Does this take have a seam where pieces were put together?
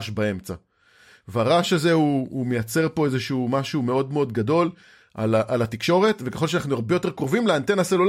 no; 0 cuts

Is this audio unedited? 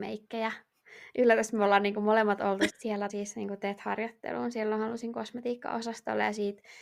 no; 2 cuts; at 2.7 s, 3.1 s

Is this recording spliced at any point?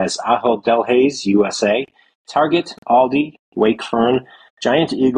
no; 0 cuts

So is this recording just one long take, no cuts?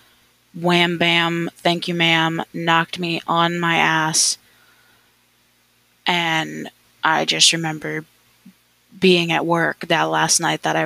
yes; 0 cuts

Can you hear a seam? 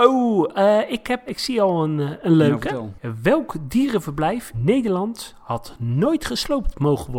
yes; 2 cuts; at 1.3 s, 4.5 s

